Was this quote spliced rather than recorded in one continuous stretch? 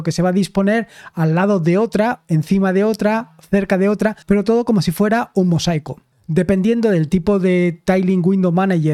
yes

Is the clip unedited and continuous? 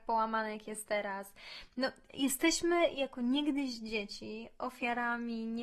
yes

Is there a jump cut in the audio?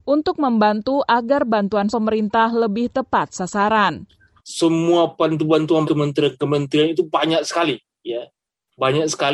yes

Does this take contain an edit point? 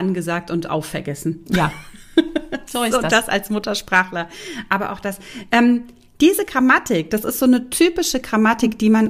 no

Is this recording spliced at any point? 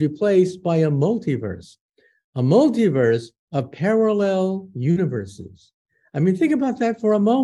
no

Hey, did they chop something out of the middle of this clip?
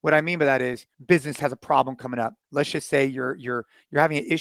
yes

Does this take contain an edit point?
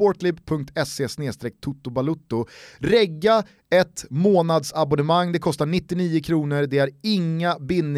no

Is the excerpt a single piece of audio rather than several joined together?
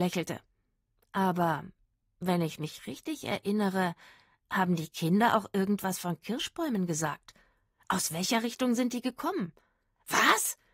yes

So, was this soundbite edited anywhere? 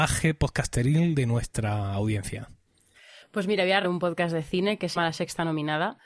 yes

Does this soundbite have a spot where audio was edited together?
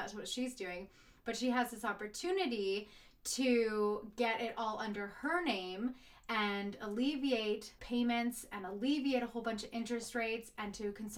yes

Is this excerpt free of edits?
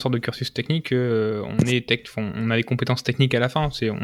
yes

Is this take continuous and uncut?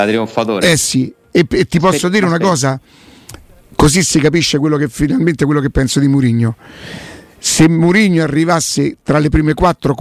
yes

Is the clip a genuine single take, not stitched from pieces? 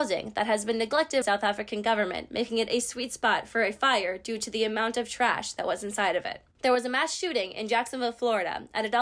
no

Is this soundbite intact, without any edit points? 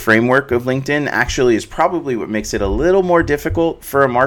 yes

